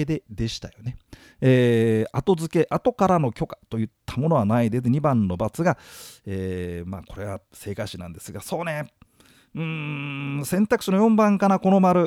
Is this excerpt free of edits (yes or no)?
no